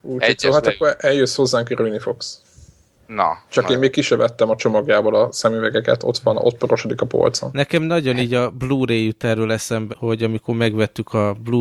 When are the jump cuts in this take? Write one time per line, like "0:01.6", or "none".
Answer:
0:09.9